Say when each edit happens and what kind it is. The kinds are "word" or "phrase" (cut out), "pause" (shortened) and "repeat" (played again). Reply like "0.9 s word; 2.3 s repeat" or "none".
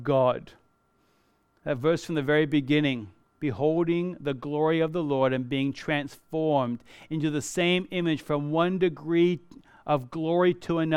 none